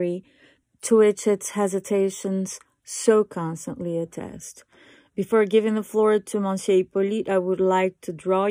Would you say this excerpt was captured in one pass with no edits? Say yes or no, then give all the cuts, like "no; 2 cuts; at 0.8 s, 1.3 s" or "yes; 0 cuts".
yes; 0 cuts